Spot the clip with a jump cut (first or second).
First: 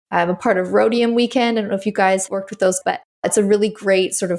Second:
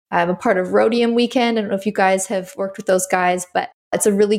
first